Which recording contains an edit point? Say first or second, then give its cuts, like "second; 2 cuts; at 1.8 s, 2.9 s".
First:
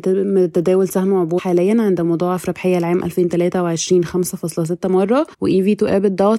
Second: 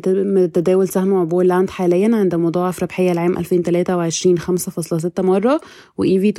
first; 2 cuts; at 1.4 s, 5.3 s